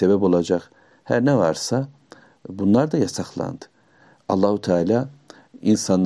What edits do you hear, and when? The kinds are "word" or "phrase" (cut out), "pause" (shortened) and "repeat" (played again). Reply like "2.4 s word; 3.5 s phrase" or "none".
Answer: none